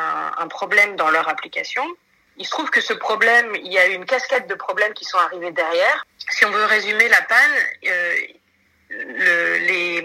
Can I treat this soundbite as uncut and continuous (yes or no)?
yes